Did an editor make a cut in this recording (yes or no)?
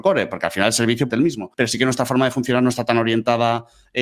yes